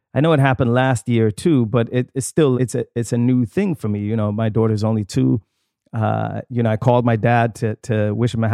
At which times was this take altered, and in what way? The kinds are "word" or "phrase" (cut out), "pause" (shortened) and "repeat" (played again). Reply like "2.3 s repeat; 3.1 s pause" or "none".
2.5 s word